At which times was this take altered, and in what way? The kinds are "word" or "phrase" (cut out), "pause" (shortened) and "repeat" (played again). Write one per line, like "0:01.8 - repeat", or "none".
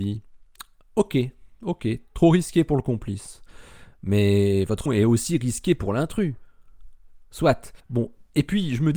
0:04.9 - word
0:07.8 - pause

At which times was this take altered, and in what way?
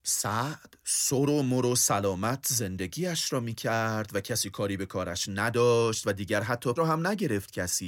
0:06.8 - word

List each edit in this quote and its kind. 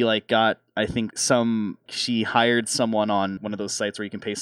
0:01.1 - word
0:01.9 - word
0:03.4 - word

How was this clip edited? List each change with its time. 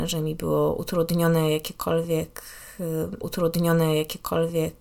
0:03.2 - repeat

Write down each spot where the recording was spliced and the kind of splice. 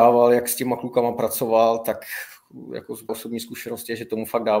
0:03.1 - word

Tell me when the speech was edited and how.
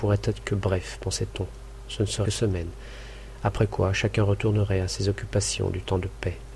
0:02.2 - phrase

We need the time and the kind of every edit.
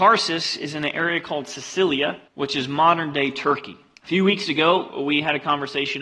0:02.3 - pause
0:03.9 - pause

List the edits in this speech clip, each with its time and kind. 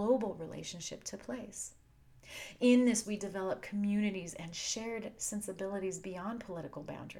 0:03.0 - word

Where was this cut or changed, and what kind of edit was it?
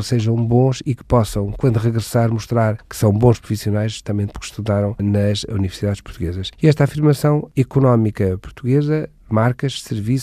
none

